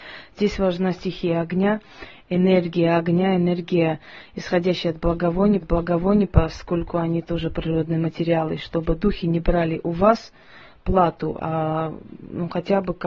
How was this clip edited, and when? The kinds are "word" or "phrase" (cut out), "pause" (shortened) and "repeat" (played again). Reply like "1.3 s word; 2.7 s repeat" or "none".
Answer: 5.6 s repeat